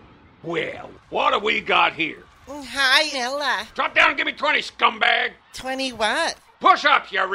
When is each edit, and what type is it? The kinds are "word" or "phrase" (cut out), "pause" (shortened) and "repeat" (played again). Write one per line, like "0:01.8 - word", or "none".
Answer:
0:00.9 - word
0:03.1 - word